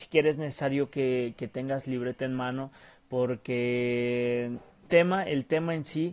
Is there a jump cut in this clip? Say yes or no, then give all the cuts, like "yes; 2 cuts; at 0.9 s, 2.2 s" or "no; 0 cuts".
yes; 1 cut; at 4.9 s